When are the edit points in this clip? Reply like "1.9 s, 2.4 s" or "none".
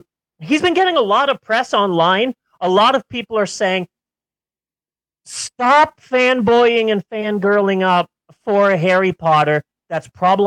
none